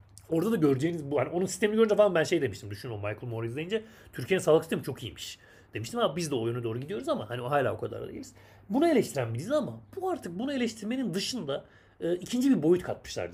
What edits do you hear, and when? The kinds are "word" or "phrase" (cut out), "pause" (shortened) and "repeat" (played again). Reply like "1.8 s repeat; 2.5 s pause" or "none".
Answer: none